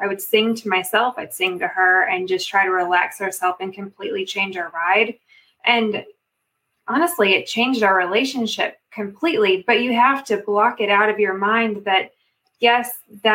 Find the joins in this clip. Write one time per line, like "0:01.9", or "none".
none